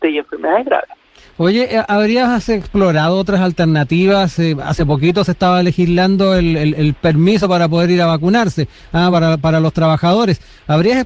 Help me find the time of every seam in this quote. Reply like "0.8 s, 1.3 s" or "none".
none